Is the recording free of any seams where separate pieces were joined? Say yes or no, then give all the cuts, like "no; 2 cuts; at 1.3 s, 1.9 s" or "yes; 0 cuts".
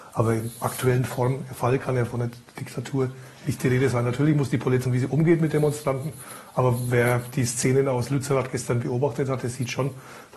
no; 1 cut; at 4.9 s